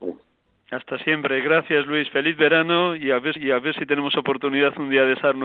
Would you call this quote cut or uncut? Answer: cut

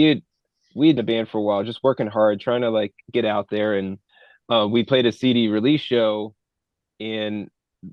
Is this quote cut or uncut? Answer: cut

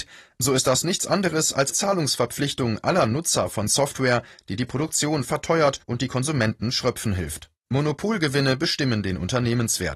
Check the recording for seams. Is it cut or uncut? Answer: cut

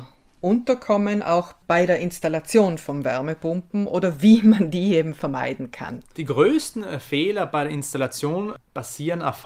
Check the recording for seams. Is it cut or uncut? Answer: uncut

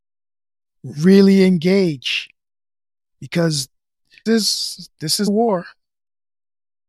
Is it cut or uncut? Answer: cut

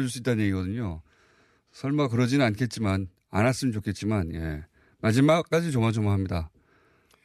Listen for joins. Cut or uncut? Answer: uncut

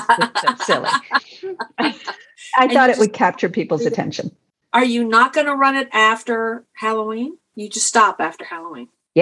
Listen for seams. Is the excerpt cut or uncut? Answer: uncut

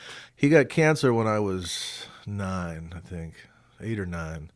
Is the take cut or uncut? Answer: uncut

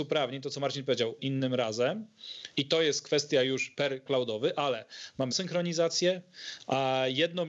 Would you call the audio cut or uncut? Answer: cut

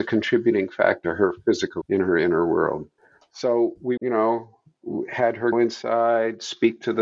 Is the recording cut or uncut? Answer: cut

